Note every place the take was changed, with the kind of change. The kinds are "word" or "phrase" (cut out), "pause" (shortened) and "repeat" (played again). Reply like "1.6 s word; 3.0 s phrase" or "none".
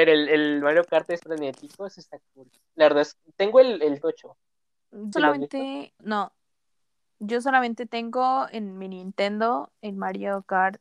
1.2 s word; 4.0 s phrase; 5.1 s word; 6.0 s word

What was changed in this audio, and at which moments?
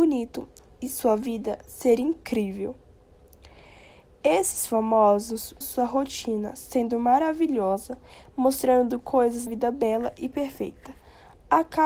5.6 s word; 9.5 s word

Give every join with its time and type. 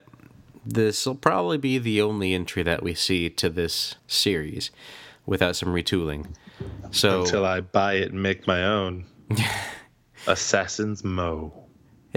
4.0 s pause

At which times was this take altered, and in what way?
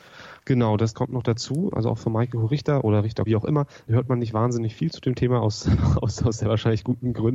3.3 s word

